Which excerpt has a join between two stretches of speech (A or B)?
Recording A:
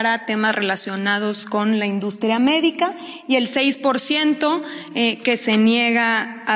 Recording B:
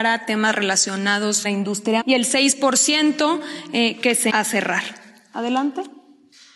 B